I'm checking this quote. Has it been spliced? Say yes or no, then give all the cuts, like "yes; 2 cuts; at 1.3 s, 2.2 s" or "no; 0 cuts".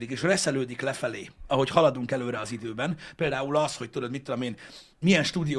no; 0 cuts